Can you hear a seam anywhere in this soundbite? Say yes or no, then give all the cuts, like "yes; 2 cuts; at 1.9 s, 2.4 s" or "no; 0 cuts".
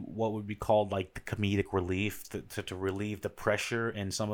no; 0 cuts